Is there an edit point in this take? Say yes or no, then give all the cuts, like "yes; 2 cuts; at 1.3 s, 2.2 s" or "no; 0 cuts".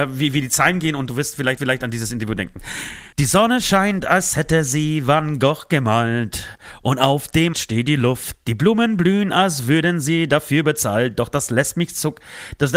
yes; 3 cuts; at 1.6 s, 3.1 s, 7.5 s